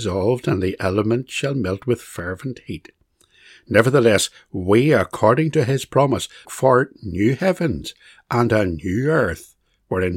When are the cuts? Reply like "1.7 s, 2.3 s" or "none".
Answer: 6.4 s